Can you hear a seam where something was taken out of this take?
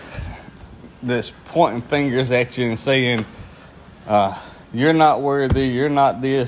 no; 0 cuts

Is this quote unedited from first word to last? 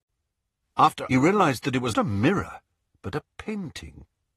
no; 2 cuts; at 1.1 s, 1.9 s

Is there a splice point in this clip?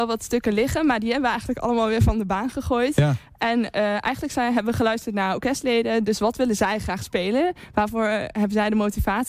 no; 0 cuts

